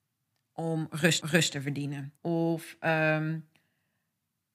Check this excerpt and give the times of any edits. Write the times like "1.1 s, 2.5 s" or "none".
1.2 s, 2.2 s